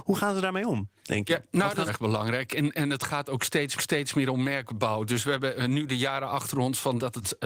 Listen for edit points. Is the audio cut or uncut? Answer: cut